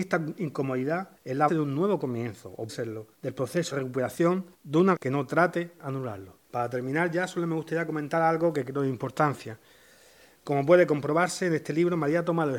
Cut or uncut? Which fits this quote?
cut